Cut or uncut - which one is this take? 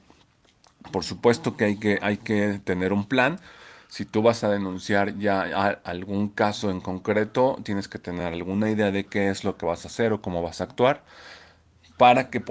uncut